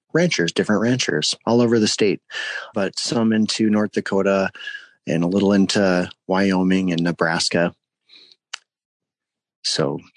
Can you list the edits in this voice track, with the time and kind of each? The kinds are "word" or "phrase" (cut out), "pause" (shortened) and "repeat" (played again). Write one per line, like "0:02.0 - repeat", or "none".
0:02.7 - phrase